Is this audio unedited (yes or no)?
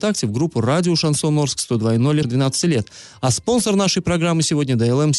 no